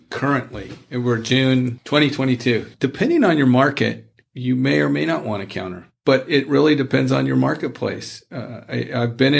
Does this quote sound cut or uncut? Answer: uncut